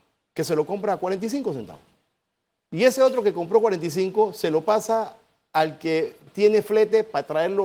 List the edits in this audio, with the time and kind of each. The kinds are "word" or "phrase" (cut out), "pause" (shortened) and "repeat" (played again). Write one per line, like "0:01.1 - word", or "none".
none